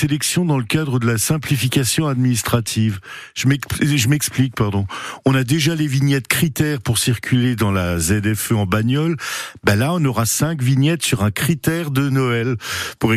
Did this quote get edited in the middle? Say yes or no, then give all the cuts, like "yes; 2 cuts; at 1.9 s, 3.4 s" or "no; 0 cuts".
no; 0 cuts